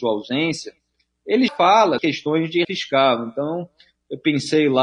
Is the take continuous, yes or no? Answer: no